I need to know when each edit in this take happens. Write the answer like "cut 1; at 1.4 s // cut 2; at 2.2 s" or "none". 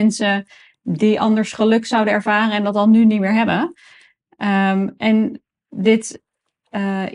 none